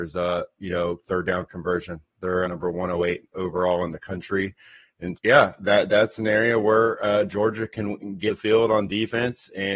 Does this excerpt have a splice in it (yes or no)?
yes